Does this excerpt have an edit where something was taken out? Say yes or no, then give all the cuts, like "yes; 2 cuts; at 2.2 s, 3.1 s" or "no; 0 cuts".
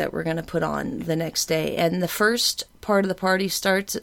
no; 0 cuts